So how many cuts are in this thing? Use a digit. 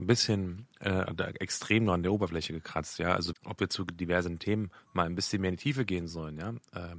1